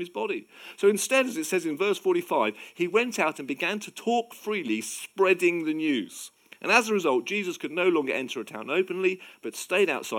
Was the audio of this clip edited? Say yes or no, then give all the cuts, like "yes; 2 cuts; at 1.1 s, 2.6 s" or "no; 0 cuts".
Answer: no; 0 cuts